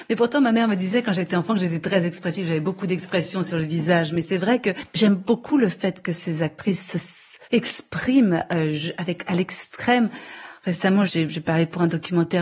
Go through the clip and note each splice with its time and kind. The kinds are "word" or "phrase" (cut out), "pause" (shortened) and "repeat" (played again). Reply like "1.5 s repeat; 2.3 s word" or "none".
4.9 s pause; 7.4 s pause

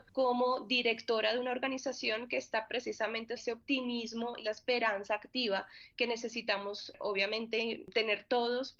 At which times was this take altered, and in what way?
2.7 s word; 3.4 s word; 4.4 s word

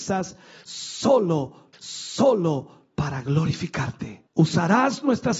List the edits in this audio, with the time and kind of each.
1.7 s repeat; 4.3 s pause

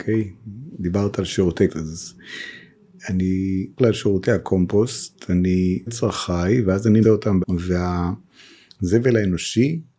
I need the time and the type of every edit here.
1.7 s word; 3.8 s word; 5.9 s word; 7.0 s word; 7.4 s word

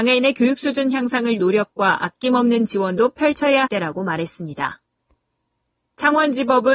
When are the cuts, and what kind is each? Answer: 1.4 s word; 3.7 s word; 5.6 s pause

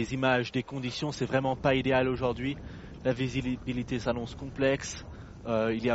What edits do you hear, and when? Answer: none

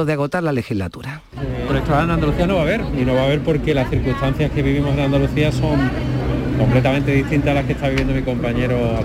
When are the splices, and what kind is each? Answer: 1.7 s word

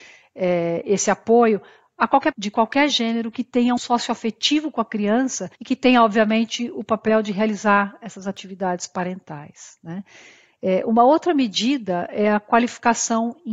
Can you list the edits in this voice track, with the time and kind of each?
2.3 s word; 3.8 s phrase; 5.6 s pause

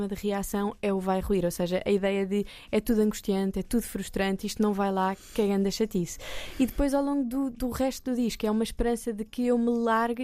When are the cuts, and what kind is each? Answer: none

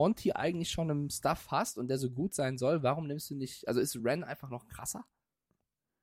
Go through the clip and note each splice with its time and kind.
none

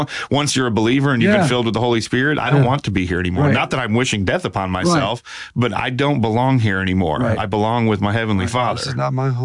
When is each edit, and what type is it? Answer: none

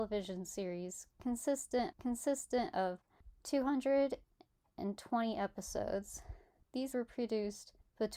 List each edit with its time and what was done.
1.9 s repeat; 6.9 s word

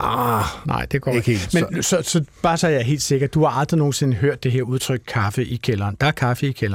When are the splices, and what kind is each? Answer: none

